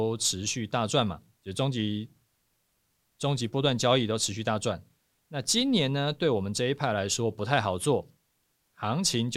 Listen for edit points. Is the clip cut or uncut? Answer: uncut